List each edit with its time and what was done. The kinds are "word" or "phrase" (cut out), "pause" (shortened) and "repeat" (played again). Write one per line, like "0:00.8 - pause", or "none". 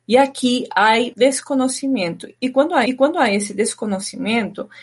0:01.1 - word
0:02.9 - repeat